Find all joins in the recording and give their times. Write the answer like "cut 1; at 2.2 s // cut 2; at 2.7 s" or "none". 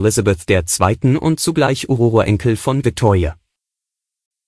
cut 1; at 2.8 s